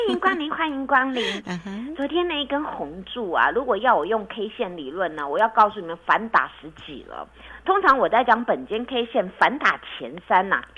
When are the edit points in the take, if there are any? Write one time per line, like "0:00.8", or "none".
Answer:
none